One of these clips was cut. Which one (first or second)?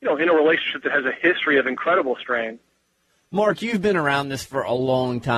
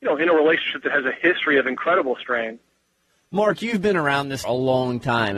second